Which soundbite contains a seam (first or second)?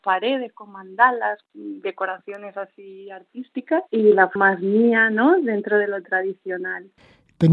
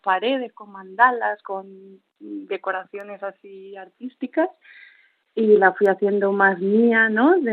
first